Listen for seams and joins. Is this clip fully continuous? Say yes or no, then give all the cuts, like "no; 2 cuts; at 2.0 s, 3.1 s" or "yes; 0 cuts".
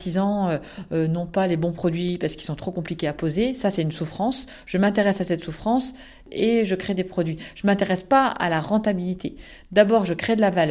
yes; 0 cuts